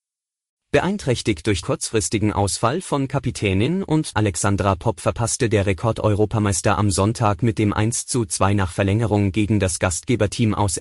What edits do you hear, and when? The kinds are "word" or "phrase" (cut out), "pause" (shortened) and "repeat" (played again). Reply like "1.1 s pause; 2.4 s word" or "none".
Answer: 1.6 s word; 4.1 s word